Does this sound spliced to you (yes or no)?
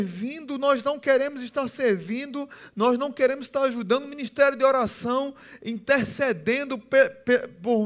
no